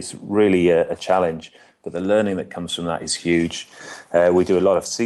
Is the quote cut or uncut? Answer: uncut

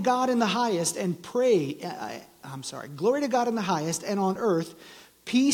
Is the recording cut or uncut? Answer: uncut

